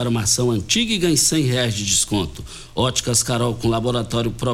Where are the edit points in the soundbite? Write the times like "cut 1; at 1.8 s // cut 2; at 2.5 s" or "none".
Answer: none